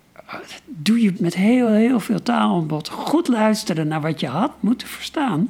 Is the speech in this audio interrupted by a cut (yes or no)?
yes